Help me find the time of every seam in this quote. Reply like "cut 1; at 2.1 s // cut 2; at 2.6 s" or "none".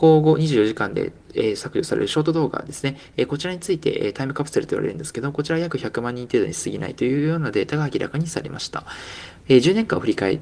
cut 1; at 9.4 s